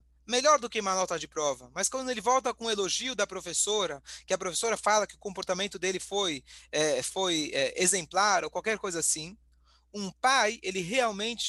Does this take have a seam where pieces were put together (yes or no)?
no